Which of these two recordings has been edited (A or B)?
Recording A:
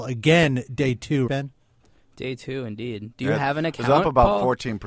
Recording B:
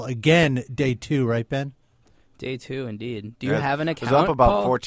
A